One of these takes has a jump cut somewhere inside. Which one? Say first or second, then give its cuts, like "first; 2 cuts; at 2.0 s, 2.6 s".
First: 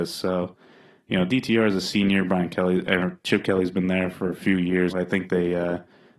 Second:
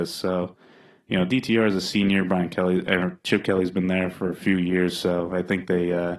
first; 1 cut; at 4.9 s